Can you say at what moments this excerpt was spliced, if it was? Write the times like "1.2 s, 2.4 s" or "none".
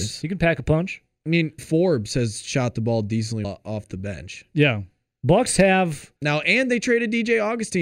1.6 s, 3.4 s, 6.2 s